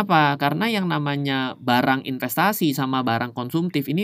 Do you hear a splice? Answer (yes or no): no